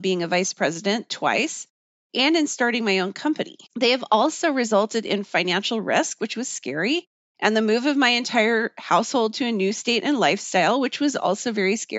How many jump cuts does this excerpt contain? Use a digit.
1